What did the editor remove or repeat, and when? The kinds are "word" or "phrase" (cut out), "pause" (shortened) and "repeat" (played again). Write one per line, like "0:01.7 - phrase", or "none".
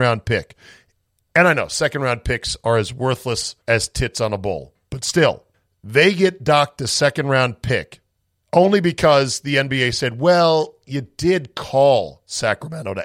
0:03.6 - pause
0:05.5 - pause
0:08.2 - pause